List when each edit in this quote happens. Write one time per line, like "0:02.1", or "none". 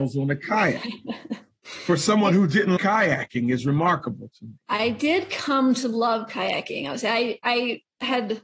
0:02.8